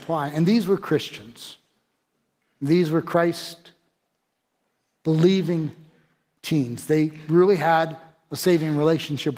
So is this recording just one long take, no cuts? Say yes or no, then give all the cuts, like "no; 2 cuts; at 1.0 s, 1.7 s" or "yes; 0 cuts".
yes; 0 cuts